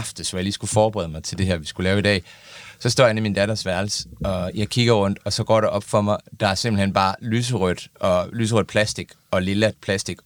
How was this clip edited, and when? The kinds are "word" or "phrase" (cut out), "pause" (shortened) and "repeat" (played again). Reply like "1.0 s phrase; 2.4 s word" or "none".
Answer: none